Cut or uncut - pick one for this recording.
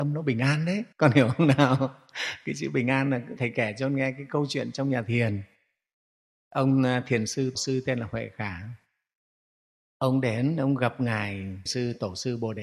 cut